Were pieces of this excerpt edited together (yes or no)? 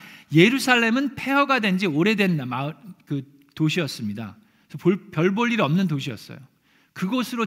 no